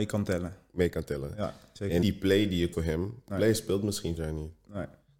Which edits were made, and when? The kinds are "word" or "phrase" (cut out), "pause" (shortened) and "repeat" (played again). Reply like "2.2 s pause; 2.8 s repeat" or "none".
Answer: 2.0 s word; 2.7 s word; 3.3 s word; 4.2 s word